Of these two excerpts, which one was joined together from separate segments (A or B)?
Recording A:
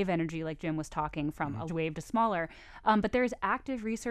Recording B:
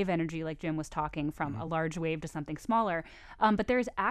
A